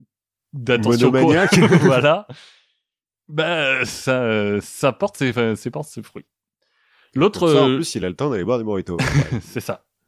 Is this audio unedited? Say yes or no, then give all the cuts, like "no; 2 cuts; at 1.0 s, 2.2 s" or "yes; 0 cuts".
yes; 0 cuts